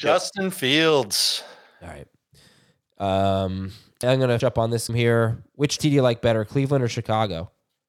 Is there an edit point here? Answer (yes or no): yes